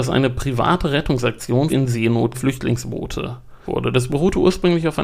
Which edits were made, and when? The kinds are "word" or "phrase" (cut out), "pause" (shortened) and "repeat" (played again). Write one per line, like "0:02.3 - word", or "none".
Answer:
0:01.7 - word
0:02.3 - word
0:03.7 - word